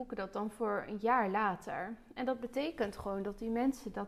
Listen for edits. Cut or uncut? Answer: uncut